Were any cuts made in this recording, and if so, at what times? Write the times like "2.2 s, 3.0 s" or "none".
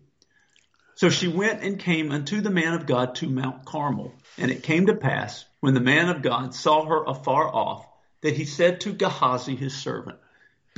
4.2 s